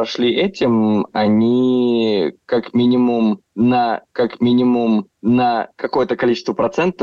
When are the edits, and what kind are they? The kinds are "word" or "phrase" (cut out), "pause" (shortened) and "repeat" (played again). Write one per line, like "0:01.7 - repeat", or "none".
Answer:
0:04.1 - repeat